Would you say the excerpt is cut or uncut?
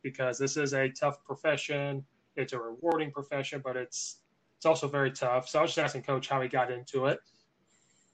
uncut